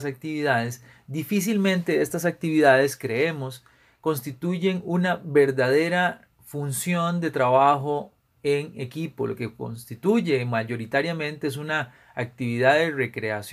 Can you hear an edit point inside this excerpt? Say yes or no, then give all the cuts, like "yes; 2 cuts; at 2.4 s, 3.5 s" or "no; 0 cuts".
no; 0 cuts